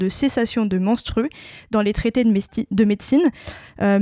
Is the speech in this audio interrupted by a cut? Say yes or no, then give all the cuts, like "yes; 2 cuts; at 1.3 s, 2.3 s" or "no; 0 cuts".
no; 0 cuts